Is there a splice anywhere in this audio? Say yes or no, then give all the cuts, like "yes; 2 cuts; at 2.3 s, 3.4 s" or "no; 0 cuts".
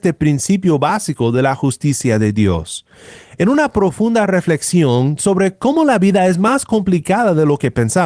no; 0 cuts